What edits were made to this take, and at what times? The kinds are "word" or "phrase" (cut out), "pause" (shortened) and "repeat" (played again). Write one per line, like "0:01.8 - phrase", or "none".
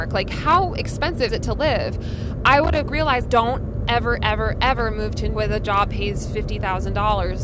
0:01.3 - word
0:02.9 - word
0:03.2 - word
0:04.2 - word
0:04.5 - word
0:05.3 - word
0:05.9 - word

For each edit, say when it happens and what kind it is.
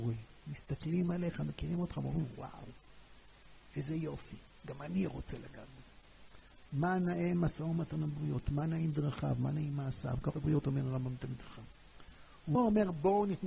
0:10.3 - word
0:12.6 - word

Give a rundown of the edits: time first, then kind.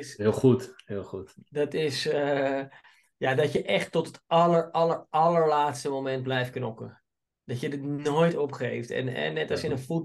none

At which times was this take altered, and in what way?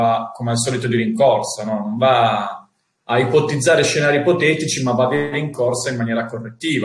none

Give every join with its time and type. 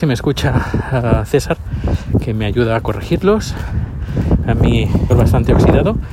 0:05.1 - word

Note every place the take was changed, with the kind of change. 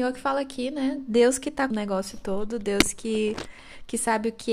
0:01.7 - word

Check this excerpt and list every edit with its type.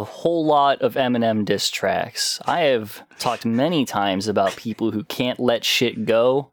0:03.1 - pause

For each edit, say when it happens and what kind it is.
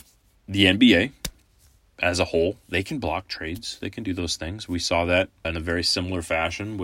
0:05.4 - word

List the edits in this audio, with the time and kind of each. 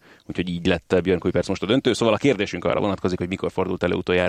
none

